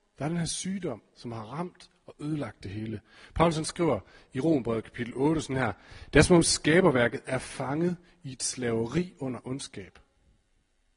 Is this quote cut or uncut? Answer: uncut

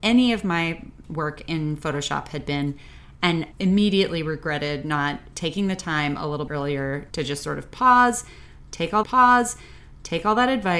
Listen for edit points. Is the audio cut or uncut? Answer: cut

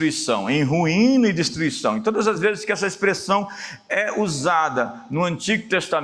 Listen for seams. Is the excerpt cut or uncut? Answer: uncut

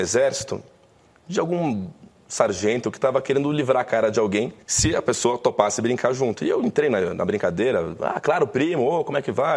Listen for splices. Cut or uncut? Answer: cut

